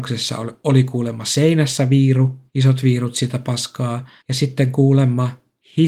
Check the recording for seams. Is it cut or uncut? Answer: cut